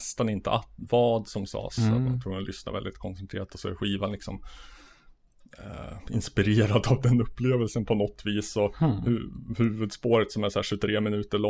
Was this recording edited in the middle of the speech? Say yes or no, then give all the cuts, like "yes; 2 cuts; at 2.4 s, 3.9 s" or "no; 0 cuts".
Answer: no; 0 cuts